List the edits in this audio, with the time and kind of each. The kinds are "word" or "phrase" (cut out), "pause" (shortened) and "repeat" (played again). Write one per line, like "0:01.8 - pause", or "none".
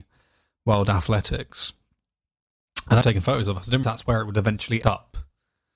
0:03.0 - phrase
0:03.8 - word
0:04.8 - word